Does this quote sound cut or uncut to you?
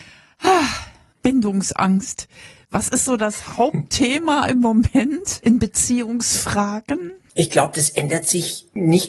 cut